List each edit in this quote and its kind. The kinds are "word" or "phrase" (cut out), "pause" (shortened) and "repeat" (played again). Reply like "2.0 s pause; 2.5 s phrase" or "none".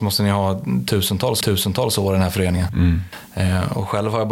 1.4 s repeat